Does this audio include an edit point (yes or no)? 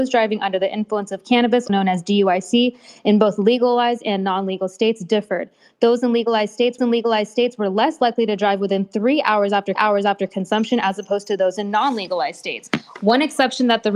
yes